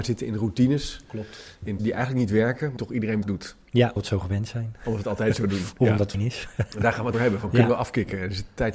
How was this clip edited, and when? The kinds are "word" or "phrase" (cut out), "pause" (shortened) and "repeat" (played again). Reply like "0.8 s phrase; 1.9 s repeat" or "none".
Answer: 1.8 s word; 2.8 s word; 3.2 s word; 4.0 s word; 6.1 s word; 7.1 s word